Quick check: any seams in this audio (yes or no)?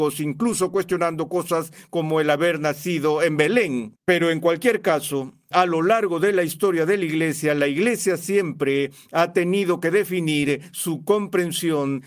yes